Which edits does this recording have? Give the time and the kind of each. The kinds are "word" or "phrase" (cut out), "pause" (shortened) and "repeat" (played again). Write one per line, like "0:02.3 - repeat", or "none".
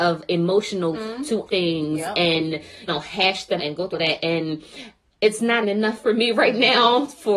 0:00.9 - word
0:01.5 - word
0:02.9 - word
0:03.6 - word
0:03.9 - word
0:05.6 - word